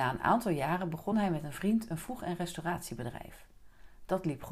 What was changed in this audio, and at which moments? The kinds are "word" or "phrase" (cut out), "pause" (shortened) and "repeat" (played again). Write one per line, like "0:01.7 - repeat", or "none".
none

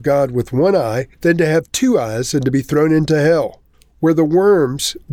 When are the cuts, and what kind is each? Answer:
0:01.1 - pause
0:03.7 - pause

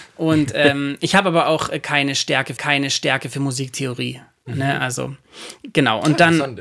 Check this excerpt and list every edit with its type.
0:02.6 - repeat

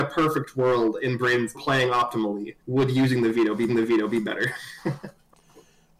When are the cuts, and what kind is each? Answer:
0:01.5 - phrase
0:02.6 - pause
0:03.7 - repeat

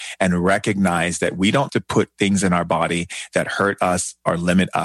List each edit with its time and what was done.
0:01.7 - word

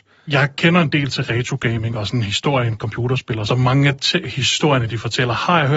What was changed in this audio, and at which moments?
0:02.8 - word
0:03.5 - phrase

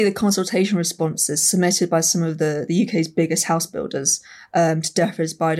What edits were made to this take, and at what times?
none

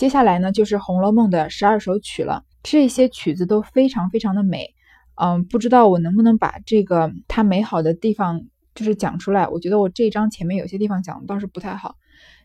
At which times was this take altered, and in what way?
0:02.5 - pause
0:07.2 - pause

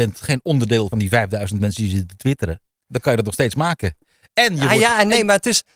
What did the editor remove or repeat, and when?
0:00.9 - phrase
0:02.7 - pause

